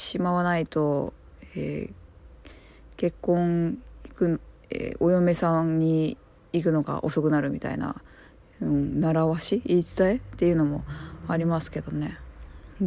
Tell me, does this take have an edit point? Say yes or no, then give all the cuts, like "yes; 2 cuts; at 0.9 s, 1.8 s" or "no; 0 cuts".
no; 0 cuts